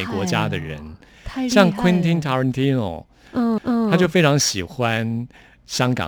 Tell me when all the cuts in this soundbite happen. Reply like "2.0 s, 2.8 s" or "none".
3.6 s

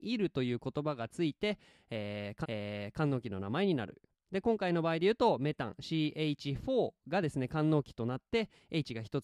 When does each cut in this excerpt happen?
2.4 s

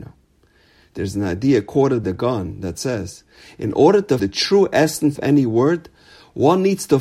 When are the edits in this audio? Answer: 2.0 s, 4.2 s, 5.2 s

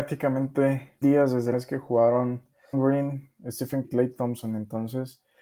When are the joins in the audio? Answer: 1.0 s, 1.5 s, 2.7 s, 3.8 s

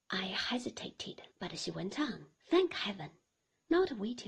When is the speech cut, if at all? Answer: 1.3 s, 2.4 s

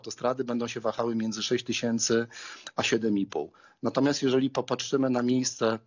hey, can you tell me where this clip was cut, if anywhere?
none

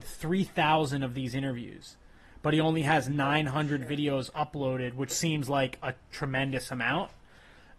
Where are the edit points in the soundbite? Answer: 5.1 s

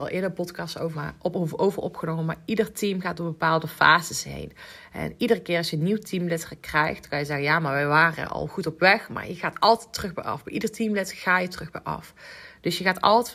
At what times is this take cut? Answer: 0.9 s

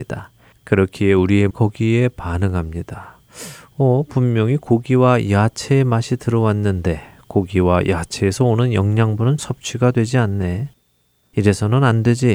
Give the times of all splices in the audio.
1.5 s, 9.4 s

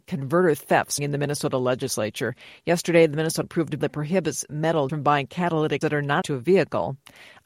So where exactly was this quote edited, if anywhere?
1.0 s, 3.4 s, 3.8 s, 4.5 s, 4.9 s, 5.8 s, 6.2 s

